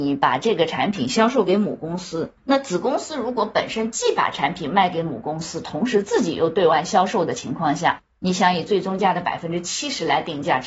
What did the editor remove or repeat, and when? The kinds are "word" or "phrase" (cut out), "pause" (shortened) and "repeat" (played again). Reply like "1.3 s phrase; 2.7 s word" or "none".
2.4 s pause